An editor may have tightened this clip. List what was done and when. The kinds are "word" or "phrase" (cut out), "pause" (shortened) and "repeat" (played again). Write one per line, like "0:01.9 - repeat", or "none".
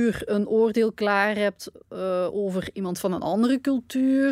none